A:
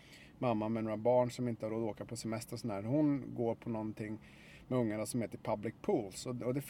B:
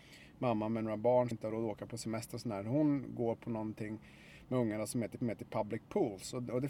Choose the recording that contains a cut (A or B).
B